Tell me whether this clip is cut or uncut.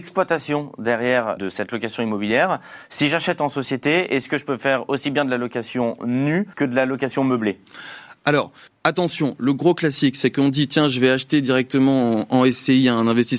cut